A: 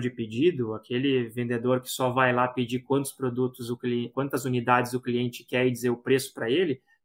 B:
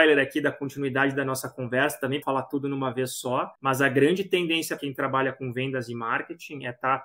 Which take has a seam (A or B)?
B